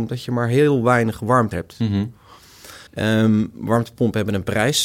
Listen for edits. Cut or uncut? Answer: cut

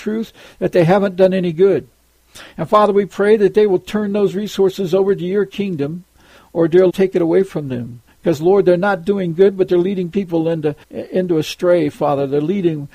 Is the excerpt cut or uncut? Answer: cut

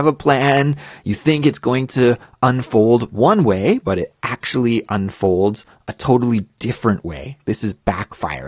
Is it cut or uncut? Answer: uncut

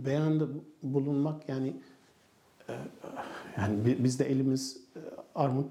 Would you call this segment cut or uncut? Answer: uncut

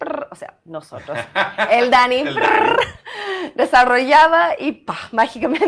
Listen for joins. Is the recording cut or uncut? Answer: uncut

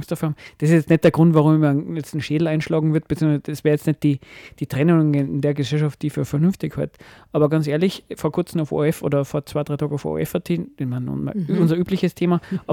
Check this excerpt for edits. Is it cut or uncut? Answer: uncut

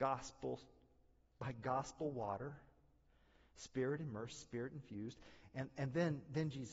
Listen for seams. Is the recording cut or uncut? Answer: uncut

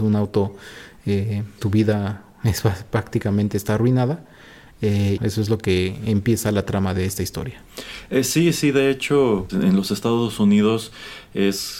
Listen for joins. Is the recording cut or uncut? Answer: cut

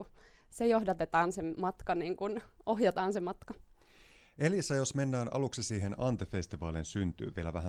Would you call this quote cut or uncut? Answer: uncut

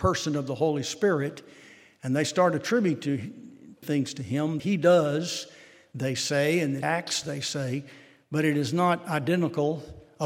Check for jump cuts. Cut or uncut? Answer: cut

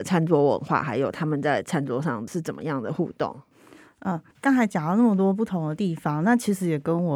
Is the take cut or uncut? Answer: cut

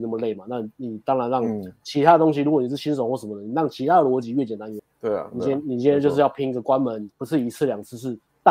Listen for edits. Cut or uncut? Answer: cut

